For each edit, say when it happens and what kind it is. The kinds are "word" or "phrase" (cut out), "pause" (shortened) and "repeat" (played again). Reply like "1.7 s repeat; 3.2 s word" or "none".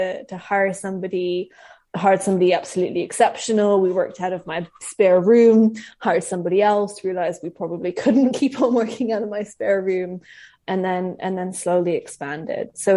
none